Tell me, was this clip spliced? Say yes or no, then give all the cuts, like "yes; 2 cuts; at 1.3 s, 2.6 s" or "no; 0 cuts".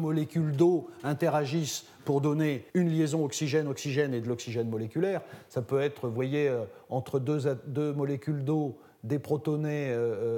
yes; 1 cut; at 2.7 s